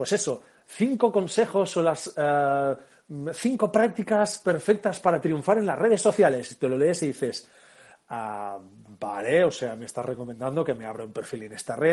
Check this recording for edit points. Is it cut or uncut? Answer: uncut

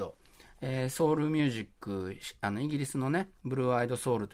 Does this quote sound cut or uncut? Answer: uncut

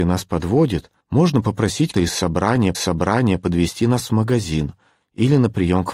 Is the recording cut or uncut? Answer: cut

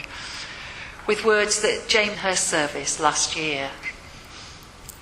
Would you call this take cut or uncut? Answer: cut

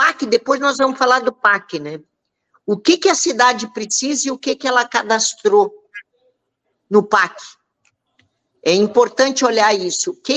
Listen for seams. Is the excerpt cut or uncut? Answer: uncut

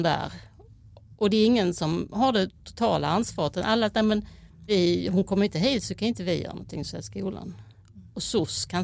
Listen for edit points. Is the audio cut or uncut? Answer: uncut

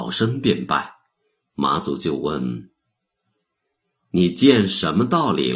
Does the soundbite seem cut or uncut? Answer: uncut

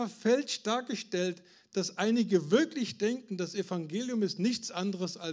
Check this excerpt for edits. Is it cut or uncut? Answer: uncut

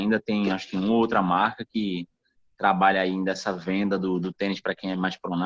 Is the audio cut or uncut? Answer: uncut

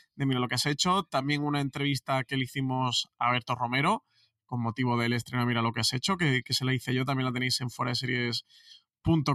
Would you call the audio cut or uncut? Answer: uncut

